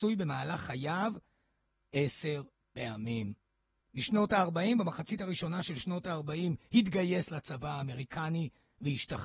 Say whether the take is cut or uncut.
uncut